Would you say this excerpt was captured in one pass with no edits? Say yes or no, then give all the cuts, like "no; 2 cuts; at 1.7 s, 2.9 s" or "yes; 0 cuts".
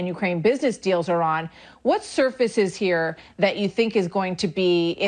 yes; 0 cuts